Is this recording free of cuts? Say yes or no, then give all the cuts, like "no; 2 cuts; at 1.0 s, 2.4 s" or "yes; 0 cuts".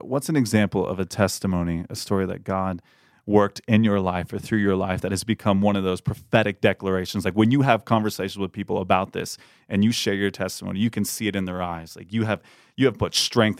yes; 0 cuts